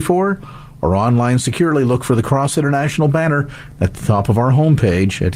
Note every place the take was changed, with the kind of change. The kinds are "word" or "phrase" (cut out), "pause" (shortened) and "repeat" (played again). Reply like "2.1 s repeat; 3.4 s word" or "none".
none